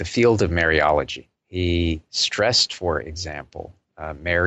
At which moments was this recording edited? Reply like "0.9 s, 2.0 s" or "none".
1.4 s